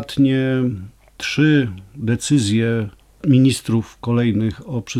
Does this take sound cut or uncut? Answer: cut